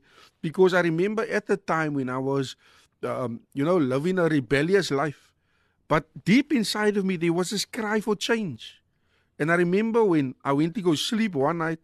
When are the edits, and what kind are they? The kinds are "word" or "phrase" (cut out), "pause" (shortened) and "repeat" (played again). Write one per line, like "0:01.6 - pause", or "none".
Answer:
none